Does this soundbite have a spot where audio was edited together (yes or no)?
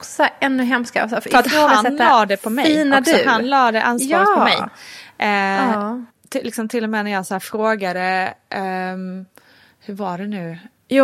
no